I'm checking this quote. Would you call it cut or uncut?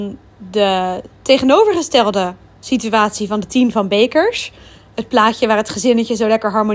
cut